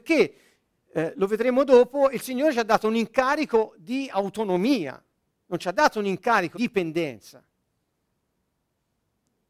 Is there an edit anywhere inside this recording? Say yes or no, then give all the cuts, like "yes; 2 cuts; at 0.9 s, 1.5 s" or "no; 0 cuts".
yes; 1 cut; at 6.5 s